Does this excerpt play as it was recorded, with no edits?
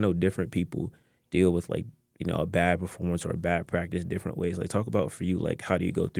yes; 0 cuts

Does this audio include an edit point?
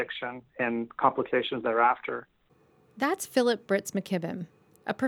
no; 0 cuts

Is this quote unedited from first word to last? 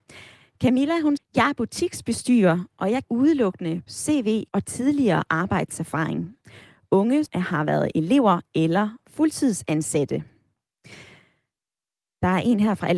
no; 5 cuts; at 1.2 s, 3.0 s, 3.9 s, 4.5 s, 7.3 s

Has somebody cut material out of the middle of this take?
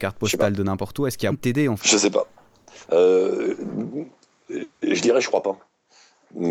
yes; 2 cuts; at 1.3 s, 1.8 s

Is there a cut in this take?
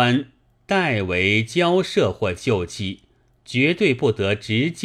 yes; 1 cut; at 3.3 s

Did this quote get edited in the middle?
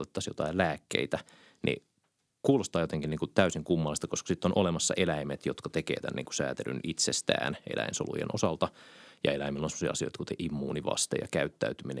no; 0 cuts

